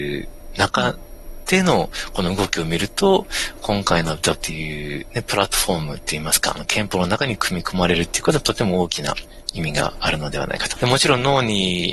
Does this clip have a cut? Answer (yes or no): yes